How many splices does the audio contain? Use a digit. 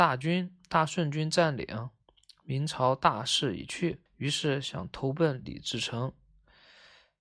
1